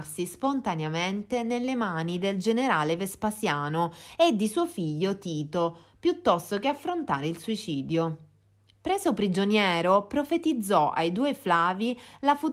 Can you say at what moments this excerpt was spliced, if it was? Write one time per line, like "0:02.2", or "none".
none